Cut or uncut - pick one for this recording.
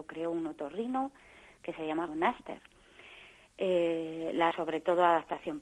cut